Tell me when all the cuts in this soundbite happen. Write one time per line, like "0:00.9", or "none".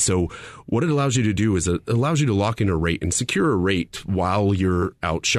none